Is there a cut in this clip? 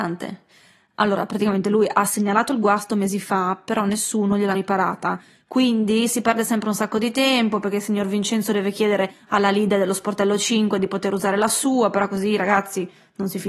yes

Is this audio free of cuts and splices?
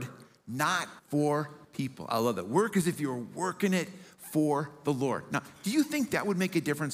no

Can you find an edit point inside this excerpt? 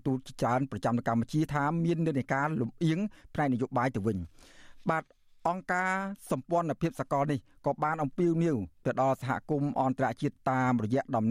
no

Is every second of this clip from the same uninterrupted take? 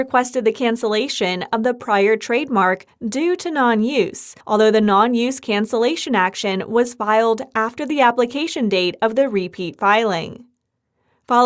no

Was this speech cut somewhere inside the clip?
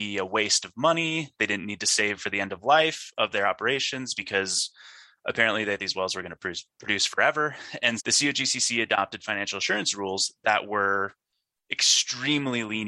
yes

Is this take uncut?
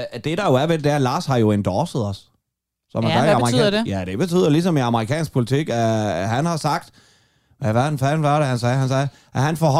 yes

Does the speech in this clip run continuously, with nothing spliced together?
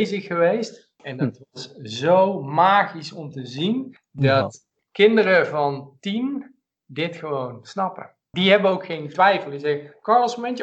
yes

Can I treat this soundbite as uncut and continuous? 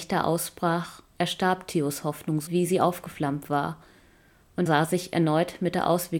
no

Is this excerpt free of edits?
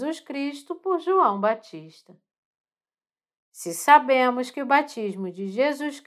yes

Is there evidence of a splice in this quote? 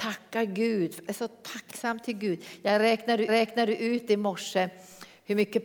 yes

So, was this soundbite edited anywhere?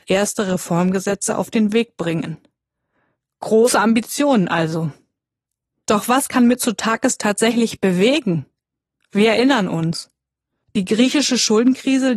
no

